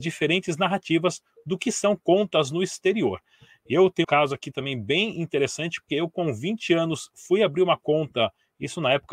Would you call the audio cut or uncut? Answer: cut